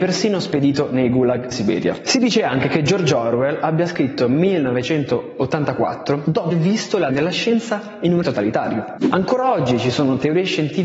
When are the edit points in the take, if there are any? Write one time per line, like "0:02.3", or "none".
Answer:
0:01.5
0:06.5
0:07.1
0:08.2